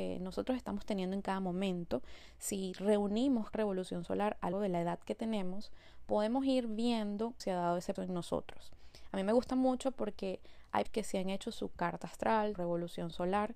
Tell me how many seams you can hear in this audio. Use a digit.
6